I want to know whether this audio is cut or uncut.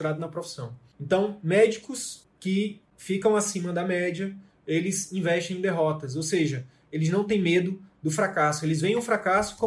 uncut